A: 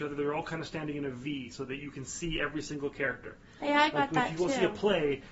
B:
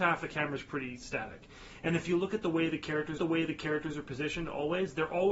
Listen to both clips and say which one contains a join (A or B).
B